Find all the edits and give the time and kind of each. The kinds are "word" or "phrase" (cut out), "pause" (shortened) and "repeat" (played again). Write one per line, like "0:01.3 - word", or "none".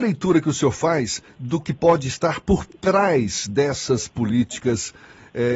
0:01.3 - pause